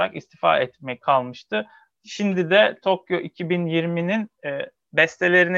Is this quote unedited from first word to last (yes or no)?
no